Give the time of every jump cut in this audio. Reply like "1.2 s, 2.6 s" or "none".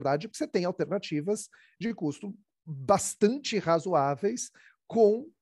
none